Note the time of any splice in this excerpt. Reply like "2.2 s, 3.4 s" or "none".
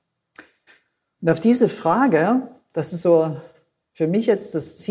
none